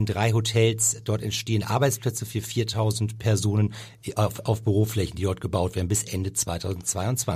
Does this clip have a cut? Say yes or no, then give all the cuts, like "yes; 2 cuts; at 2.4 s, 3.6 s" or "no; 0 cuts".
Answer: no; 0 cuts